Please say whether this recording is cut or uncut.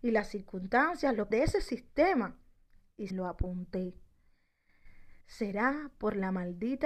cut